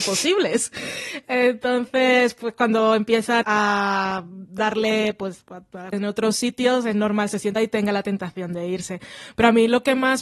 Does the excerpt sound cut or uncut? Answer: cut